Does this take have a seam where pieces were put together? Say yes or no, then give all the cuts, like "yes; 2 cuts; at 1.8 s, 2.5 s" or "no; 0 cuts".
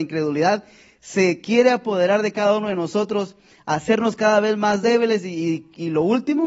no; 0 cuts